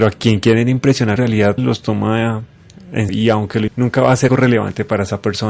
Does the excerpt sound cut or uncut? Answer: cut